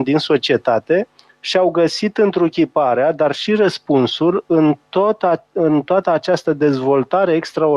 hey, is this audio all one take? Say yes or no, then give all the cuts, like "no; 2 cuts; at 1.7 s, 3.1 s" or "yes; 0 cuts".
yes; 0 cuts